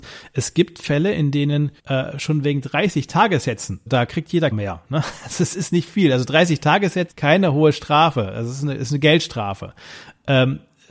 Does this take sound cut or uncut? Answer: cut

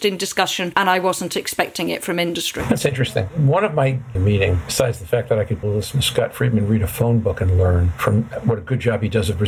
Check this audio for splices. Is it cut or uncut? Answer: cut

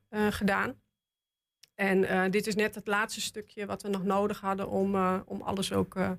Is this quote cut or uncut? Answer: uncut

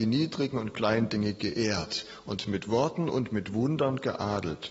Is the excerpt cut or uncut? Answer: uncut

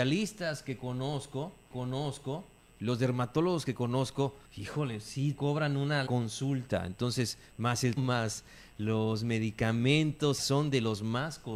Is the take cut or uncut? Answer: cut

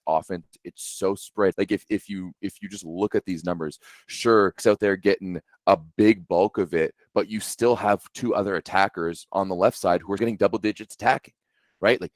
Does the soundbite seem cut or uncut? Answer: cut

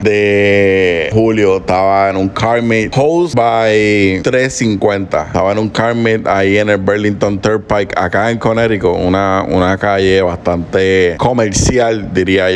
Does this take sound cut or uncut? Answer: cut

